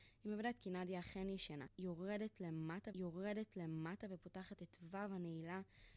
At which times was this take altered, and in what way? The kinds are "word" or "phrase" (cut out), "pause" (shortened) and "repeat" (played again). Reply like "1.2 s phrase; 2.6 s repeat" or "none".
2.9 s repeat

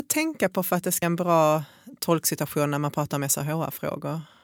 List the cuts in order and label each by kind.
1.0 s word

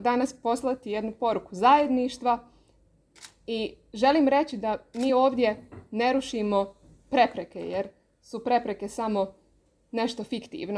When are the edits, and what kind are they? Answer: none

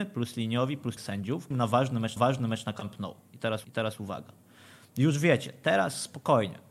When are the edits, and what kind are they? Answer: 1.0 s word; 1.5 s phrase; 2.2 s repeat; 3.6 s repeat

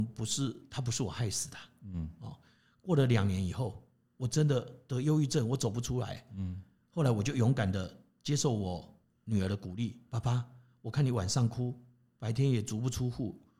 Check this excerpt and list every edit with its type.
none

